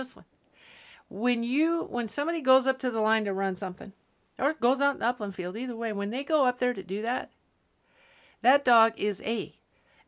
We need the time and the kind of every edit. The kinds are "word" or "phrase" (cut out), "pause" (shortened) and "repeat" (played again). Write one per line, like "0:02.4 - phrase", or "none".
none